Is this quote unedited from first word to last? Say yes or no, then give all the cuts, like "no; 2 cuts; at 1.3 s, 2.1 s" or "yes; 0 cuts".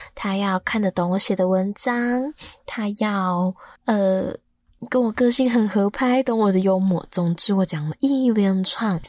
no; 1 cut; at 3.7 s